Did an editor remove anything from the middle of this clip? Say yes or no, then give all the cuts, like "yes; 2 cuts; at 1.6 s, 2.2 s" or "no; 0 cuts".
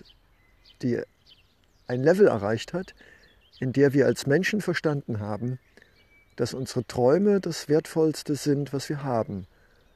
no; 0 cuts